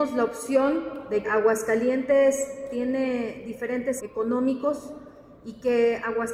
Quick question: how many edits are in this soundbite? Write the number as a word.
two